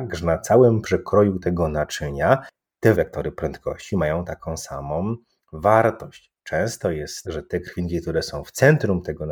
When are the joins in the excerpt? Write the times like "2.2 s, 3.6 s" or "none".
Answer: 2.9 s, 7.2 s